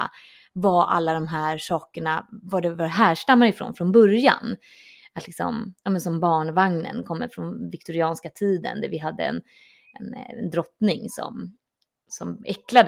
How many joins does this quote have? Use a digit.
0